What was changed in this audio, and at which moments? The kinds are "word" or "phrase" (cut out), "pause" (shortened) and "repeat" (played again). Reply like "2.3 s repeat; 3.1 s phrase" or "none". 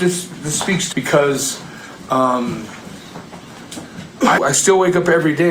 0.9 s word; 4.4 s word